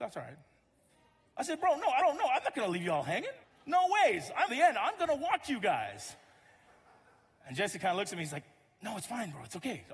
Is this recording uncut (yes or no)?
no